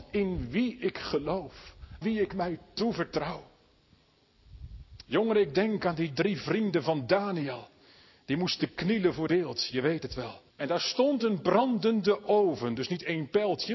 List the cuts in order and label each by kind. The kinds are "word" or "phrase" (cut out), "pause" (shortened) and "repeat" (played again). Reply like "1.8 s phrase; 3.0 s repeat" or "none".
2.0 s word; 9.3 s word; 10.5 s pause